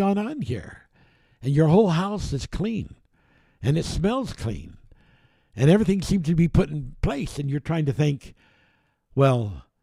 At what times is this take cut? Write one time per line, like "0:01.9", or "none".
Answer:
none